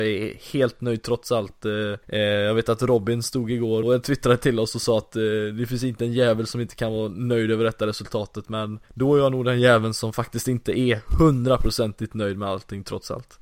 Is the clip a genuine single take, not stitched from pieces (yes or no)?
no